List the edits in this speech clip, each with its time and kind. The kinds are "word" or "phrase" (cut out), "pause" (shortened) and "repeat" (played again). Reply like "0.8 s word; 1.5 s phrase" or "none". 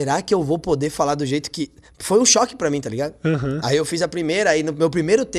none